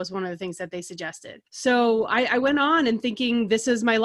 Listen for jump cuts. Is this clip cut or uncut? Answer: cut